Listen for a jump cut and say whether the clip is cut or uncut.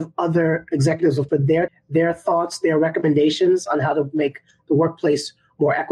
cut